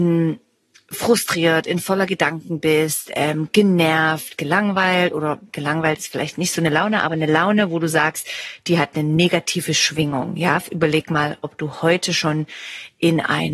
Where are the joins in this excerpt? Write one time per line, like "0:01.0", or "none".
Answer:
none